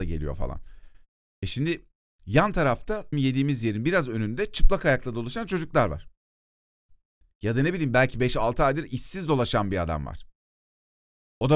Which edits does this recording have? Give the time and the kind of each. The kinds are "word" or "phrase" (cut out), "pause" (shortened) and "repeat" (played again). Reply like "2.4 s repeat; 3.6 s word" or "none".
3.1 s word